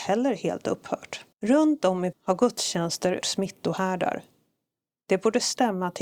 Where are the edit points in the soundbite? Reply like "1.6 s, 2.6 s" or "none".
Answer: 1.3 s, 2.1 s, 3.2 s